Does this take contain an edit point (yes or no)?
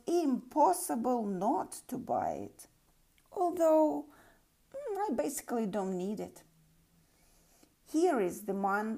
no